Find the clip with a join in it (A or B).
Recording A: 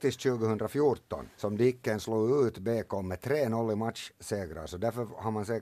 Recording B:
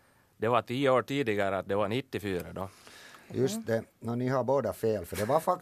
A